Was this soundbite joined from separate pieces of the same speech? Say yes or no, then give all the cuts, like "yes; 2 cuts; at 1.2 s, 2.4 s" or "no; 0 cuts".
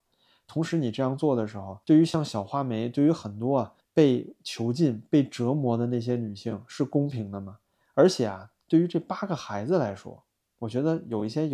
yes; 2 cuts; at 1.8 s, 3.8 s